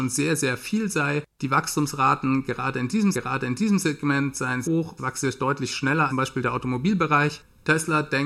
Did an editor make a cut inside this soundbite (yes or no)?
yes